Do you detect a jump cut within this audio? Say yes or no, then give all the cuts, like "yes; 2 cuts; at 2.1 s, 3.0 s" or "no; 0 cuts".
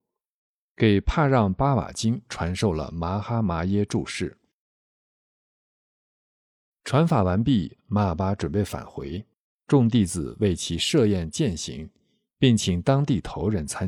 yes; 1 cut; at 9.5 s